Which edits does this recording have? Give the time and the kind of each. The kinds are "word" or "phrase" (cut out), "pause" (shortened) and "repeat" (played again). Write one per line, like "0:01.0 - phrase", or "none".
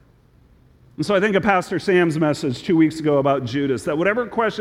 none